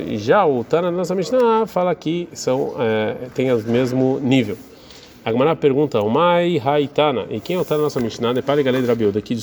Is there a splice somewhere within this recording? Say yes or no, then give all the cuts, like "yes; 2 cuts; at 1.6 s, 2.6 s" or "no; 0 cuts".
no; 0 cuts